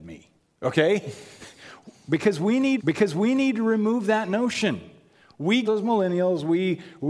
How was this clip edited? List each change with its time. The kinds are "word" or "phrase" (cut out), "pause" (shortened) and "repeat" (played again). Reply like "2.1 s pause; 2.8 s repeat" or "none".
2.8 s repeat; 5.6 s phrase